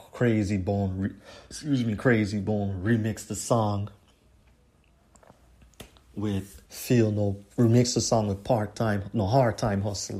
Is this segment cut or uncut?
cut